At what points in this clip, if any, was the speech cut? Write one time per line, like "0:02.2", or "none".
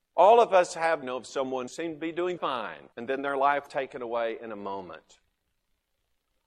0:01.0
0:01.7
0:02.4
0:02.9
0:03.7